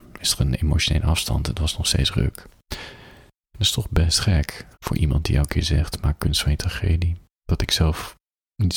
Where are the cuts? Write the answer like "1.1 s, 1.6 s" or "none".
3.4 s, 4.7 s